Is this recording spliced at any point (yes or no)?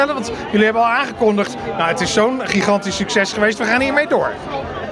no